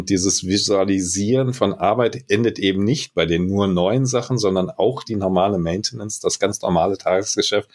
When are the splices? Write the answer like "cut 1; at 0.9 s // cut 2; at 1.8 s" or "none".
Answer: none